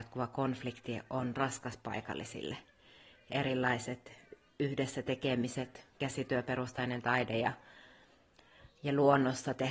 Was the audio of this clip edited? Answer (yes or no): yes